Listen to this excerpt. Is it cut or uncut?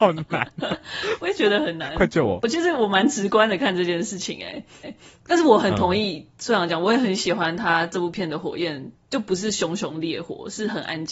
cut